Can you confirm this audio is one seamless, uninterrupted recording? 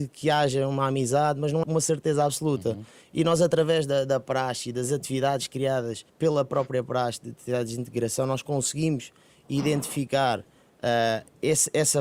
no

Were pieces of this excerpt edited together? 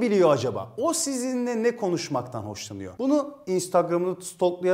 no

